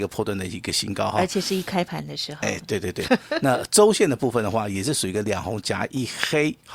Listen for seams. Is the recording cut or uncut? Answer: cut